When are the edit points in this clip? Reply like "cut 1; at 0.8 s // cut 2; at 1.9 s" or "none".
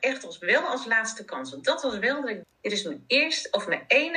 cut 1; at 2.4 s